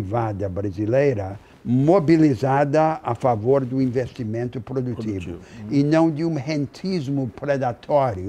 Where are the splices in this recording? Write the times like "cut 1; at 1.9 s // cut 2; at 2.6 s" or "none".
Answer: cut 1; at 1.5 s